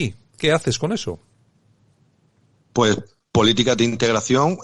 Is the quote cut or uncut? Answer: uncut